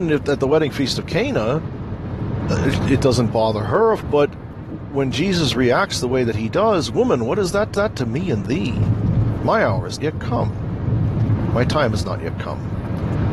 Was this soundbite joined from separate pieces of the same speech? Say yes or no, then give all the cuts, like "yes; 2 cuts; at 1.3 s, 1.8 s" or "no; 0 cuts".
yes; 3 cuts; at 4.0 s, 7.7 s, 10.0 s